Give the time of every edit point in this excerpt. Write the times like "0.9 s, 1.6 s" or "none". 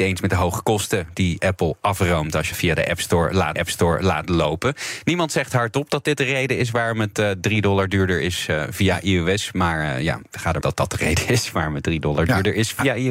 2.5 s, 3.6 s, 10.6 s